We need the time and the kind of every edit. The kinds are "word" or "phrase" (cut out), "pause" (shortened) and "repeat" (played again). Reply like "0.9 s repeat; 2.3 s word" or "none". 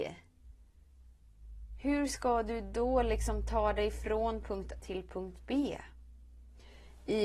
4.8 s word